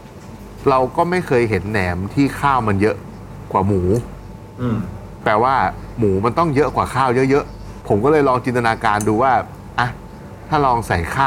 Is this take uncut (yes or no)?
no